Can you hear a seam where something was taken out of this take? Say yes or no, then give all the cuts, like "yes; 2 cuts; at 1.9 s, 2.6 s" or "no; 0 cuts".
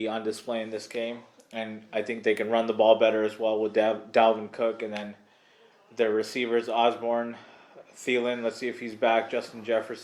no; 0 cuts